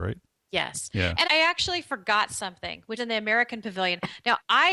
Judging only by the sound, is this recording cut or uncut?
cut